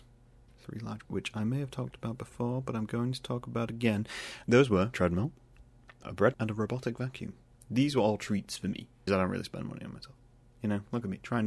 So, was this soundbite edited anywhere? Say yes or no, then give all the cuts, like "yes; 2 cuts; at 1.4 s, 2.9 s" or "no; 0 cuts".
yes; 6 cuts; at 1.0 s, 4.4 s, 4.9 s, 6.0 s, 6.3 s, 9.1 s